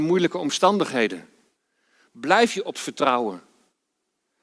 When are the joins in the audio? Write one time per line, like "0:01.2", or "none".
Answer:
0:02.7